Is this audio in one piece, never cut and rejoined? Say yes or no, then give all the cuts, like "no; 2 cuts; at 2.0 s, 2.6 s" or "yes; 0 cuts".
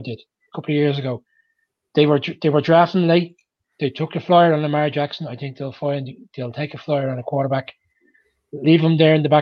yes; 0 cuts